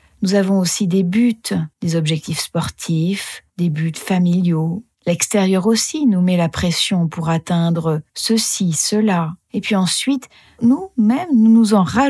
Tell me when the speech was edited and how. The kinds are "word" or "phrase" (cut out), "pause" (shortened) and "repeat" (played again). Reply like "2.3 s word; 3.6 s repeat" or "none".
1.7 s pause; 3.5 s pause; 4.9 s pause; 8.1 s pause; 9.4 s pause